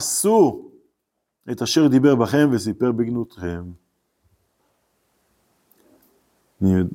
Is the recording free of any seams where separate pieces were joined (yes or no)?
yes